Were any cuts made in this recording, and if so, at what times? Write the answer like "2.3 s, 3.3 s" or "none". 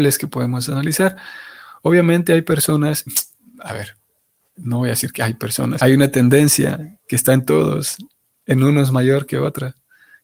3.1 s, 4.5 s, 5.8 s